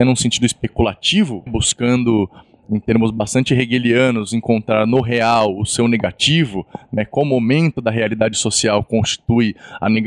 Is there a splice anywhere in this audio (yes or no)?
yes